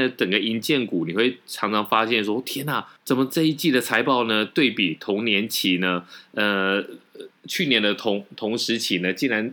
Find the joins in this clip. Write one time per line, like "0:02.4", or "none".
0:03.0